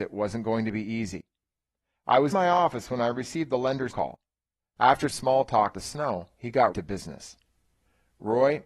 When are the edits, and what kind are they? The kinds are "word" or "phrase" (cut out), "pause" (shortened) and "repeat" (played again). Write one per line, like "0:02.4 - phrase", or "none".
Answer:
0:02.3 - word
0:03.9 - word
0:05.1 - word
0:05.7 - word
0:06.7 - word